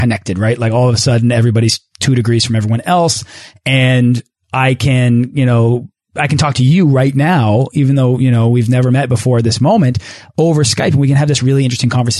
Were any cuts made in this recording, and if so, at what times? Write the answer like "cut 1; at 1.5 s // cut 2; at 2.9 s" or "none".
none